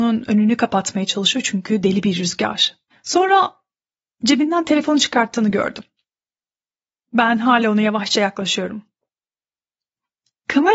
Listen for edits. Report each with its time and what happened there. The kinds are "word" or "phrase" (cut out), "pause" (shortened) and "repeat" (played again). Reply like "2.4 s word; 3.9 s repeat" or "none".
2.9 s pause